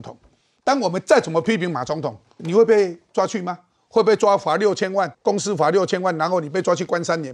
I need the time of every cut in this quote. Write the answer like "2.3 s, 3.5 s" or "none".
2.4 s, 5.1 s